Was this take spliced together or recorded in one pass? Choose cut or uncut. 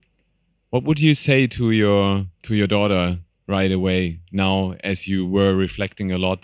cut